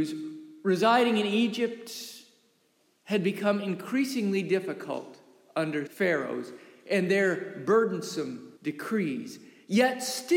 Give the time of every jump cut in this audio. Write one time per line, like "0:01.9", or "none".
0:05.9
0:08.6